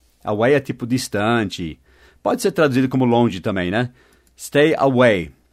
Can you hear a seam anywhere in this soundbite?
no; 0 cuts

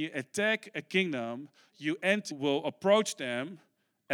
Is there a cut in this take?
yes; 1 cut; at 2.3 s

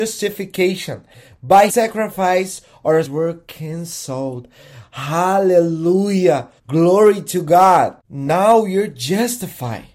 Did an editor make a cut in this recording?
yes; 4 cuts; at 1.7 s, 3.0 s, 6.6 s, 8.0 s

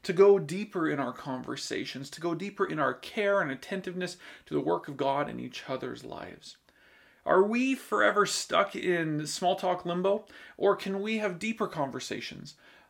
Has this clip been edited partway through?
no; 0 cuts

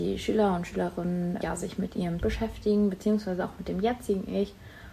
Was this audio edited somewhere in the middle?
yes; 2 cuts; at 1.4 s, 2.2 s

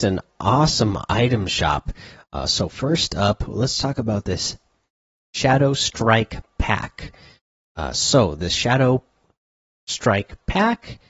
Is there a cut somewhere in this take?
no; 0 cuts

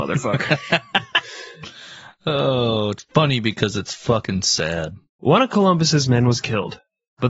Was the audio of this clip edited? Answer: yes; 1 cut; at 5.1 s

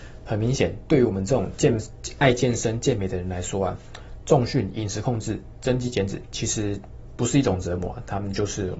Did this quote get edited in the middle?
no; 0 cuts

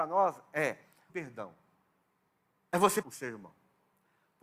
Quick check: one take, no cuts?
no; 3 cuts; at 1.1 s, 2.0 s, 3.0 s

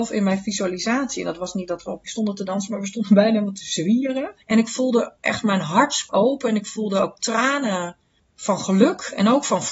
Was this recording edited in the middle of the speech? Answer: yes; 4 cuts; at 2.1 s, 4.4 s, 6.1 s, 8.2 s

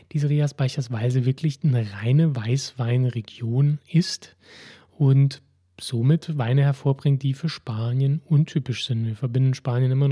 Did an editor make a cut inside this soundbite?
no; 0 cuts

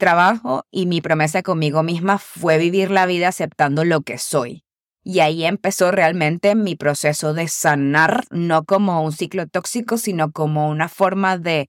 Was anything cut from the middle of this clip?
no; 0 cuts

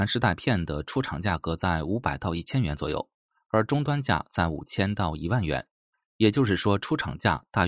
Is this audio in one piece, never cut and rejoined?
yes; 0 cuts

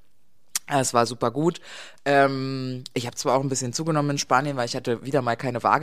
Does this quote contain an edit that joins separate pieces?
no; 0 cuts

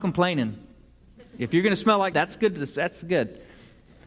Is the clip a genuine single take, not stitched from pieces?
no; 1 cut; at 2.1 s

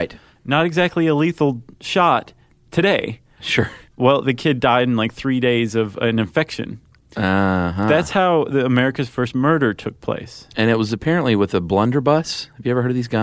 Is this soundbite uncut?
yes; 0 cuts

